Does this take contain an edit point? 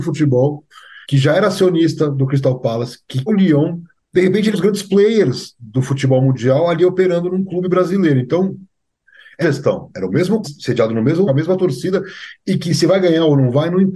yes; 7 cuts; at 1.0 s, 3.3 s, 4.0 s, 4.5 s, 9.4 s, 10.4 s, 11.3 s

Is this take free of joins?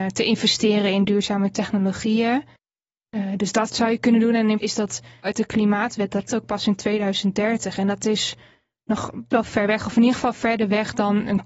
no; 5 cuts; at 3.7 s, 4.6 s, 5.2 s, 6.3 s, 9.3 s

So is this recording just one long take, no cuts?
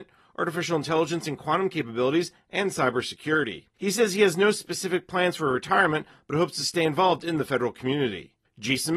no; 1 cut; at 3.7 s

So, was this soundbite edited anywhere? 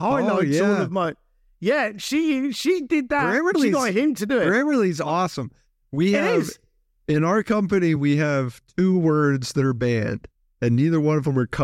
no; 0 cuts

